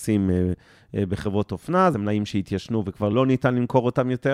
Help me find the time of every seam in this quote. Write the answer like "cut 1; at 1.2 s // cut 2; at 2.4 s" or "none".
cut 1; at 1.9 s